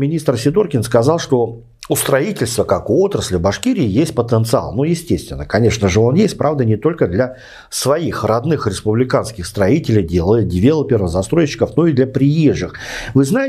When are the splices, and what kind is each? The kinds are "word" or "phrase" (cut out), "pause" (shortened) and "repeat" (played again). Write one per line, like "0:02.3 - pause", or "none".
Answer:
none